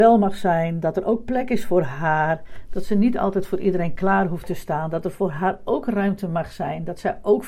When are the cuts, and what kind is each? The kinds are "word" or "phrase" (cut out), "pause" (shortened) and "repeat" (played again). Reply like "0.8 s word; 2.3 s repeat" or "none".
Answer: none